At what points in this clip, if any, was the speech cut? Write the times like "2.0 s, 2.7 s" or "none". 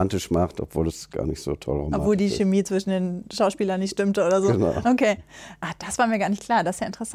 none